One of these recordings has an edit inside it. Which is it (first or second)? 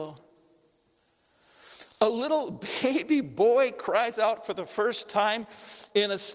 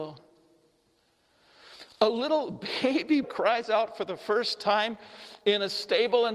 second